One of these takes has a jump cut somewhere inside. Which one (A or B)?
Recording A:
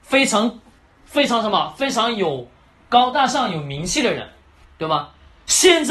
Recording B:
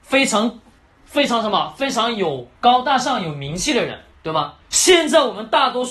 B